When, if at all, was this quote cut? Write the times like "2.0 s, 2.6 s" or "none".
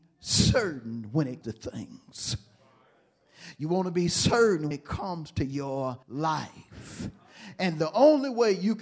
1.4 s, 4.7 s, 6.0 s